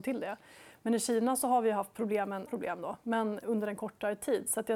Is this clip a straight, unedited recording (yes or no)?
no